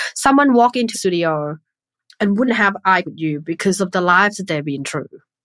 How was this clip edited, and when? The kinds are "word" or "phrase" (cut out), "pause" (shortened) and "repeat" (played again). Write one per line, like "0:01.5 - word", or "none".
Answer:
0:00.9 - word
0:02.5 - word
0:03.0 - word